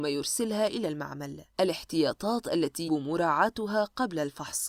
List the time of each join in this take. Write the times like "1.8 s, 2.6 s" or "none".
1.5 s, 2.9 s